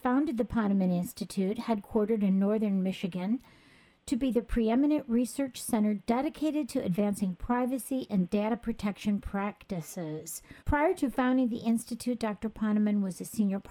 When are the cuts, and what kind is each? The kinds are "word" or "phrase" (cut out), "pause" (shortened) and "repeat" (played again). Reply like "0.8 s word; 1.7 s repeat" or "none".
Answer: 10.6 s pause